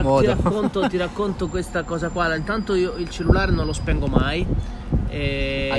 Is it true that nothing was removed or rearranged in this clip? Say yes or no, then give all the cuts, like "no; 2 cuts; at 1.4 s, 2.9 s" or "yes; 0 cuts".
yes; 0 cuts